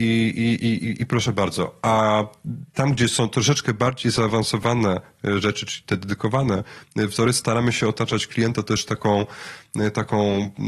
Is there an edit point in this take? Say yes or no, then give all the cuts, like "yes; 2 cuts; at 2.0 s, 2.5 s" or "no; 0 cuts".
no; 0 cuts